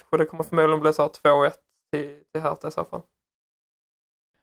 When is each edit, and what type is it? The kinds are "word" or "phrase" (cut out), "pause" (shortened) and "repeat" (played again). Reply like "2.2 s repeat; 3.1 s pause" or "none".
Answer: none